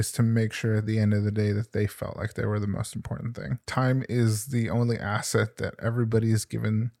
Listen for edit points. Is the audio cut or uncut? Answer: cut